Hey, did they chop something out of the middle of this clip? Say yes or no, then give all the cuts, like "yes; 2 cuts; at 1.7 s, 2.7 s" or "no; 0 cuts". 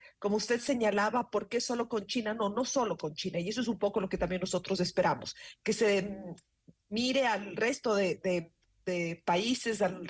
no; 0 cuts